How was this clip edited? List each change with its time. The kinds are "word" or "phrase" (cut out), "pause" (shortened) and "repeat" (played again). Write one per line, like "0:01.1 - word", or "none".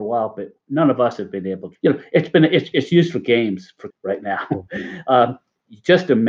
0:01.7 - word
0:02.7 - word
0:03.9 - word